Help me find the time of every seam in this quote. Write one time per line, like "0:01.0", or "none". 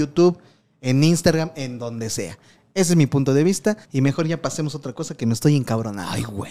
0:03.8

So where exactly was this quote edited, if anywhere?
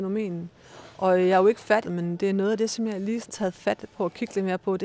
0:01.8
0:03.3

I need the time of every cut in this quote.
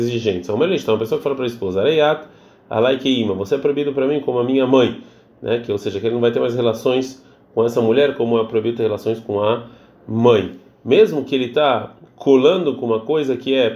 none

